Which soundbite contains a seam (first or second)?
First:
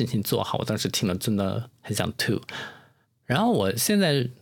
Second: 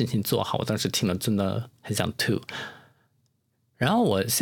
first